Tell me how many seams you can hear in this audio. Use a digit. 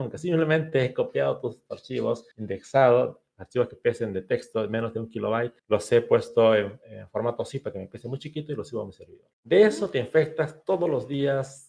3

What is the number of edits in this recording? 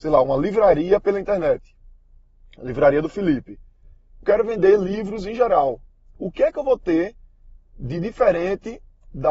1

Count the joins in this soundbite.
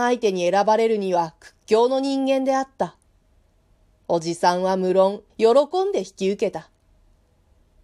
1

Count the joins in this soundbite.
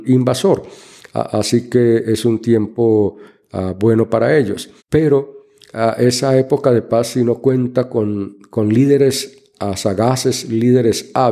1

